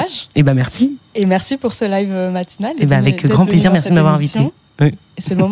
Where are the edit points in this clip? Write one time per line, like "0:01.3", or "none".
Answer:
none

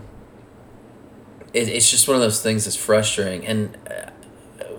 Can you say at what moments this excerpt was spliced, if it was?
0:01.5

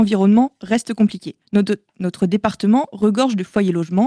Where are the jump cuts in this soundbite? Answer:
0:01.4

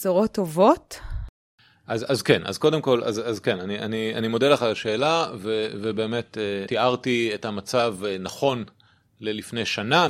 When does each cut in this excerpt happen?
none

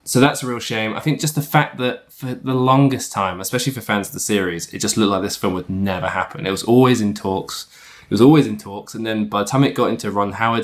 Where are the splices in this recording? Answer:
none

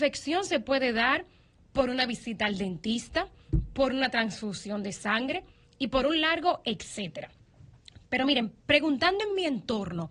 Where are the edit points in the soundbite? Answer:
none

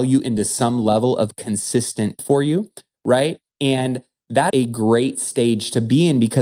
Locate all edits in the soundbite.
0:02.2
0:03.5
0:04.5

